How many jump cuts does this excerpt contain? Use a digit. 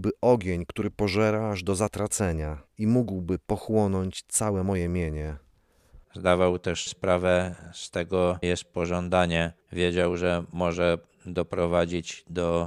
4